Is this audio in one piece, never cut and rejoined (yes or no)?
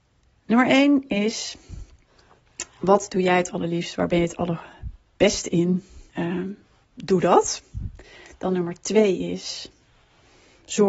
no